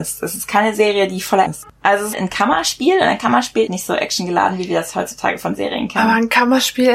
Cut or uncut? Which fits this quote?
cut